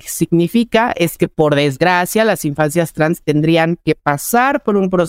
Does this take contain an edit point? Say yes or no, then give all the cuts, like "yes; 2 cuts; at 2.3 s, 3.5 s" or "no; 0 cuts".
no; 0 cuts